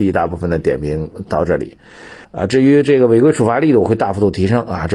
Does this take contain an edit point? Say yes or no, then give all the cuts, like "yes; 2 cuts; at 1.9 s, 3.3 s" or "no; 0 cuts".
yes; 1 cut; at 2.2 s